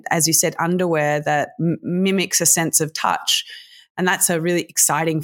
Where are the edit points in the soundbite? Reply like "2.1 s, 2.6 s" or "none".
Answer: none